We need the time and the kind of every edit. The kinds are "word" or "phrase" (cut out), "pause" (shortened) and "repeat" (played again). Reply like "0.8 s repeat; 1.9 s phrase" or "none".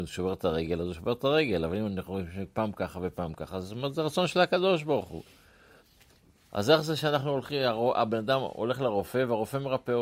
none

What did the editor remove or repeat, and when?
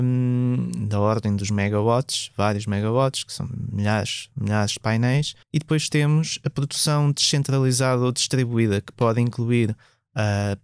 5.4 s pause

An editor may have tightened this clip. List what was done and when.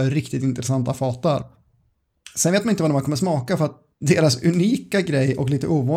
3.9 s pause

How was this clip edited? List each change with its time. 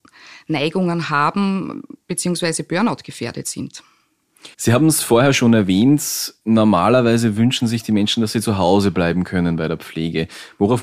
4.5 s pause

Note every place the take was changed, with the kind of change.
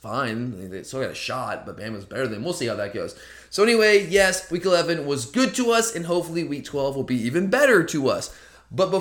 none

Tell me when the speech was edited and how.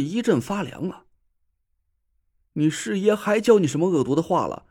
none

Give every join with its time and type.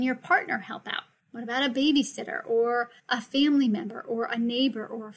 1.2 s pause; 3.0 s pause

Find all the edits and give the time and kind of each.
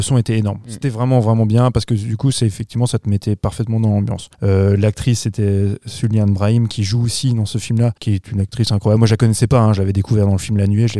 4.3 s pause; 8.0 s pause

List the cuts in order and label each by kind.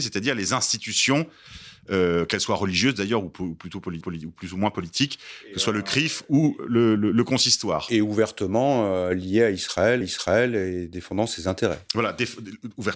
4.0 s repeat; 7.0 s word; 10.0 s repeat

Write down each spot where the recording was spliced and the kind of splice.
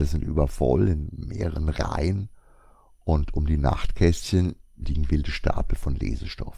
none

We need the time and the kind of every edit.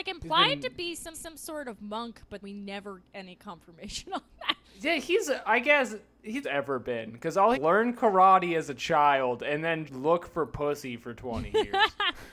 1.1 s repeat; 2.4 s word; 3.0 s word; 4.6 s pause; 6.4 s phrase; 7.5 s phrase; 9.9 s word

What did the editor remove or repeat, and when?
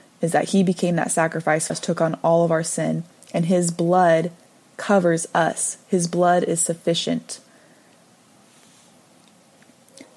1.7 s word

